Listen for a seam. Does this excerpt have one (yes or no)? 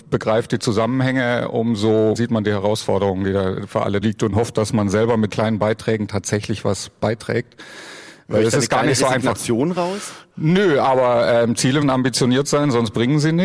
yes